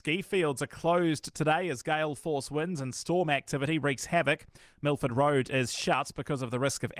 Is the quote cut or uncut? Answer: uncut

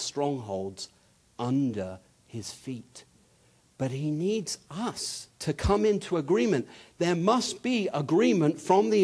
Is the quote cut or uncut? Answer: cut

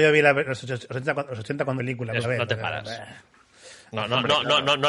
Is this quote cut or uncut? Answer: cut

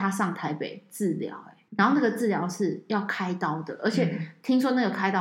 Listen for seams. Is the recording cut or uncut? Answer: cut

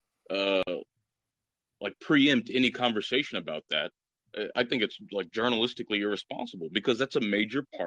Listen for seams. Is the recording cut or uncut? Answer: uncut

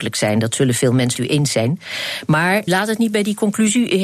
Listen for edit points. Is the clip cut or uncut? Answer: cut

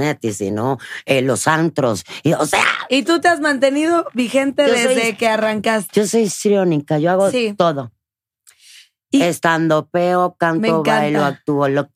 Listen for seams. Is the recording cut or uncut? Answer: uncut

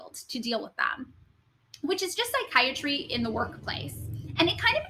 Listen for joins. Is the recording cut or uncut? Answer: uncut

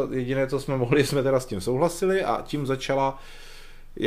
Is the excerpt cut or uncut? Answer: uncut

